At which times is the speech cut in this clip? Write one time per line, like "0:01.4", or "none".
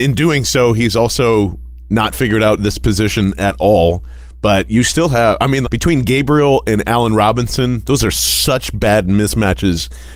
0:05.6